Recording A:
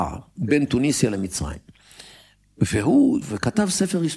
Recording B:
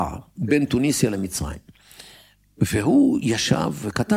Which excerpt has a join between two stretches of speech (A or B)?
A